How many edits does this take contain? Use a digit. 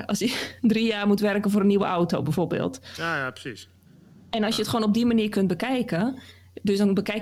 0